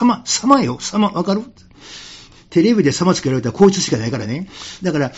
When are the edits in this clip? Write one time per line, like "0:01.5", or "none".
none